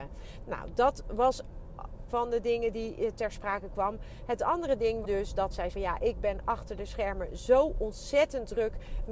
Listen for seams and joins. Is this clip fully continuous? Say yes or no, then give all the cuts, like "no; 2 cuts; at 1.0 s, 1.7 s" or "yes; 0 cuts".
no; 3 cuts; at 2.1 s, 5.0 s, 5.7 s